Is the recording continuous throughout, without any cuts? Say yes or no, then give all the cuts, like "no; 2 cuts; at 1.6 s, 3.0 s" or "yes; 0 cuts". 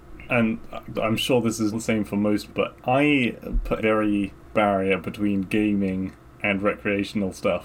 no; 6 cuts; at 0.9 s, 1.7 s, 2.5 s, 3.8 s, 4.5 s, 6.2 s